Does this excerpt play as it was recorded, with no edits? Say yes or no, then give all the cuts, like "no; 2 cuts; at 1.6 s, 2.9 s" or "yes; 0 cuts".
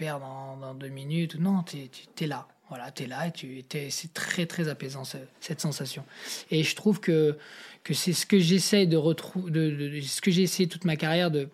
no; 1 cut; at 5.3 s